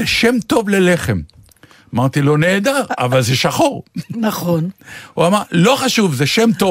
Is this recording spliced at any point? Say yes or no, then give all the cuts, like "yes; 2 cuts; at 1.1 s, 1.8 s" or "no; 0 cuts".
no; 0 cuts